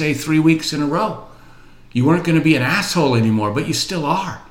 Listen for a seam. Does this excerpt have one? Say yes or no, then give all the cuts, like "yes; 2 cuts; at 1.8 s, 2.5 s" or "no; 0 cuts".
no; 0 cuts